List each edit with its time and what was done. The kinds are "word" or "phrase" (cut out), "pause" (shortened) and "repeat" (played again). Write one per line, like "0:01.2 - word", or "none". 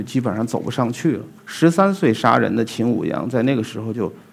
0:01.4 - pause